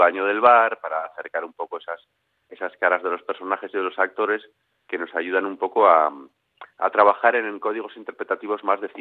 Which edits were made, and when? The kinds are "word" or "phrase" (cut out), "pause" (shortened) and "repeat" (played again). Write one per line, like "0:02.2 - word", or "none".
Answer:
none